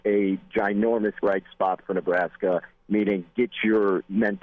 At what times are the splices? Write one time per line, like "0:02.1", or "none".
0:01.2